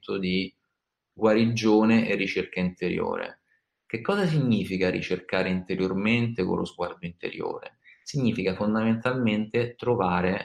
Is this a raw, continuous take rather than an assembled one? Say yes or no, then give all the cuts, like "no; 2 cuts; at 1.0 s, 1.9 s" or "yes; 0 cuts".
yes; 0 cuts